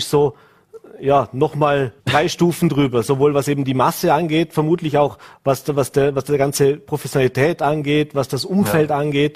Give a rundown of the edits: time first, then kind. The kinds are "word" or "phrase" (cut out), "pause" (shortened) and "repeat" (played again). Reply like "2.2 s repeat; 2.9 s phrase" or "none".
2.0 s pause